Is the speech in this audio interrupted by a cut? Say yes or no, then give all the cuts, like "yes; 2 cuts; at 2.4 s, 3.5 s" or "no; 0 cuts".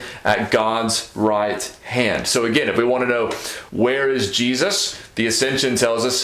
yes; 1 cut; at 3.7 s